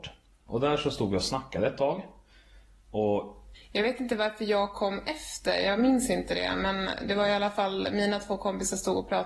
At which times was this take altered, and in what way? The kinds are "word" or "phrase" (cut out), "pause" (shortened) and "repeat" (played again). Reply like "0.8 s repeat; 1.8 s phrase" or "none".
none